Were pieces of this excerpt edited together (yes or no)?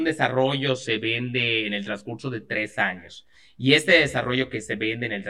no